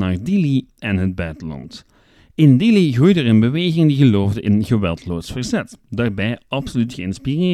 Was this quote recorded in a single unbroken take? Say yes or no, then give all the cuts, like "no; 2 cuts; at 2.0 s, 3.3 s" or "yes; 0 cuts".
yes; 0 cuts